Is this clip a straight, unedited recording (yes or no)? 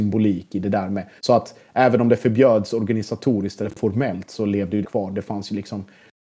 no